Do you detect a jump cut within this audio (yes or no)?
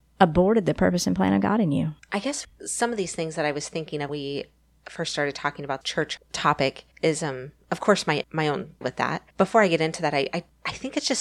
yes